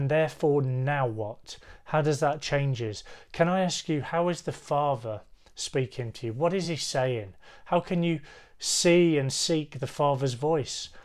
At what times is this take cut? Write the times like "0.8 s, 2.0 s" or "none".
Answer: none